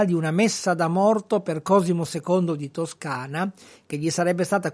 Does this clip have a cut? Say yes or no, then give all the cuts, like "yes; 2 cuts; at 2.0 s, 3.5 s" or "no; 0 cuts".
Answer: no; 0 cuts